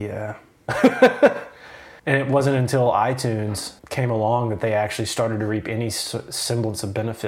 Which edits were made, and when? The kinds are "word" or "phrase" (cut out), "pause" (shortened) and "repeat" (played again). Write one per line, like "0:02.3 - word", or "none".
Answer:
0:02.0 - pause
0:03.8 - pause